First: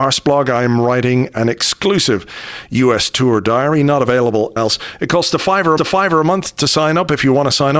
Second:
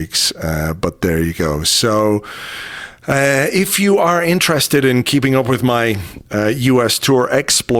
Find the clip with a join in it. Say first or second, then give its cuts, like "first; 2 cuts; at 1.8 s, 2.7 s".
first; 2 cuts; at 4.6 s, 5.8 s